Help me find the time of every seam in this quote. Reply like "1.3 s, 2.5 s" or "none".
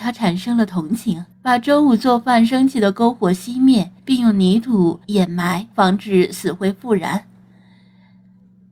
1.3 s, 4.0 s, 5.0 s, 5.7 s

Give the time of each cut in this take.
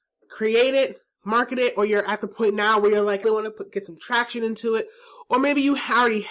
3.2 s

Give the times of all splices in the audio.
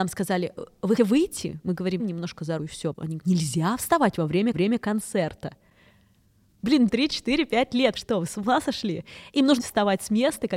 1.0 s, 2.0 s, 2.6 s, 3.2 s, 4.5 s, 6.9 s, 8.0 s, 9.6 s

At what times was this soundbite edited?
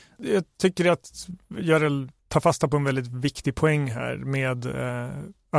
2.2 s

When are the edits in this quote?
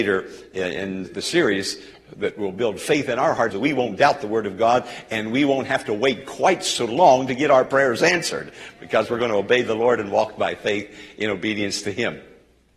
1.0 s, 3.5 s

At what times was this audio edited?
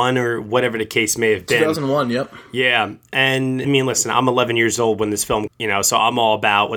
3.6 s, 5.5 s

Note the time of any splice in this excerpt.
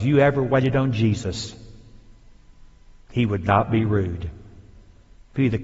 none

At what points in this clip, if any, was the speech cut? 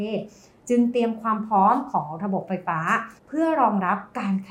3.2 s

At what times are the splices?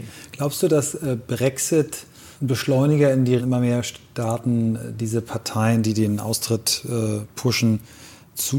2.3 s, 3.4 s

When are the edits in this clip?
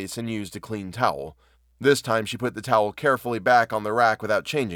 1.5 s

